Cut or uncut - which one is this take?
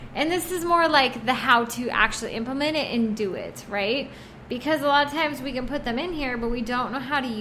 uncut